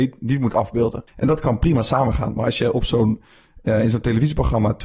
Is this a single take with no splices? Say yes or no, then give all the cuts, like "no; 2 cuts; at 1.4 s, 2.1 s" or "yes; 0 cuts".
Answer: no; 1 cut; at 1.1 s